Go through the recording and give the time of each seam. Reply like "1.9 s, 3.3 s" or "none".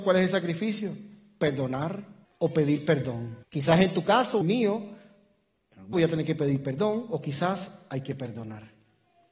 2.2 s, 3.4 s, 4.4 s, 5.9 s